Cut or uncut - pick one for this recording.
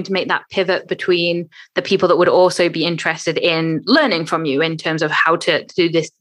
uncut